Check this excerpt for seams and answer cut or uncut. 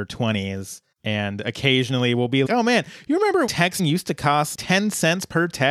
cut